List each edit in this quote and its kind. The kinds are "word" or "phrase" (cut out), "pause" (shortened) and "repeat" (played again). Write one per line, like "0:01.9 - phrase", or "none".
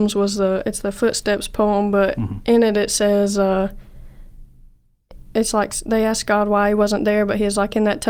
none